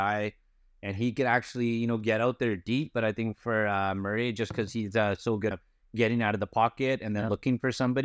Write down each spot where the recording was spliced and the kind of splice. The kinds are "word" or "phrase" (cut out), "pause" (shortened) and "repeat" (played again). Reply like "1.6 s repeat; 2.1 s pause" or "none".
5.5 s phrase